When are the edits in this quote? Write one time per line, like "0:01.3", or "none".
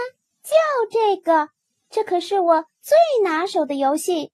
none